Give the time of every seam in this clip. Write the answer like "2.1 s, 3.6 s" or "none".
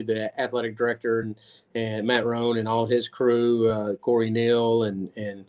none